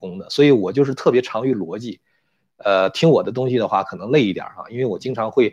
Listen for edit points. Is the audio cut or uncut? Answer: uncut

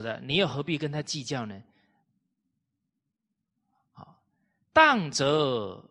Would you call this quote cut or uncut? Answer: uncut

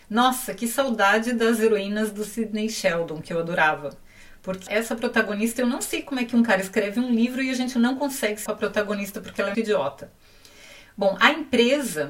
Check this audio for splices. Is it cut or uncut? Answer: cut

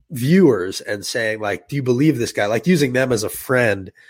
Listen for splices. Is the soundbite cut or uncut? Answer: uncut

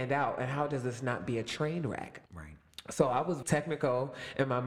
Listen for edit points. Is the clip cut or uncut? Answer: cut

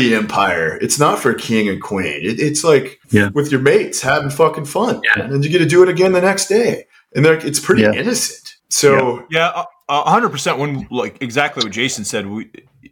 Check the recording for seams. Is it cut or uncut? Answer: cut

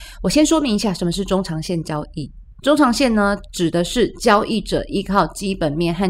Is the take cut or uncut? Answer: cut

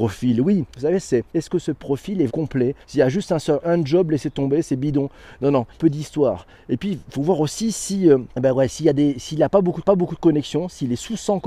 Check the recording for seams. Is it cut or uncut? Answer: cut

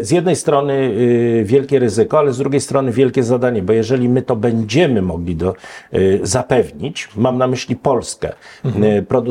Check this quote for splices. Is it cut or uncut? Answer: uncut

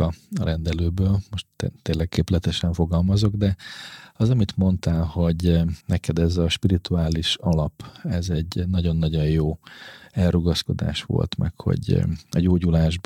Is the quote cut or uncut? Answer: cut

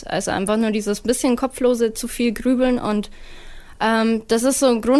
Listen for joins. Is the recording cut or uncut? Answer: uncut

